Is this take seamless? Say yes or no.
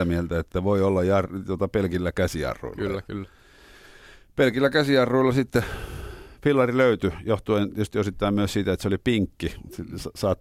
yes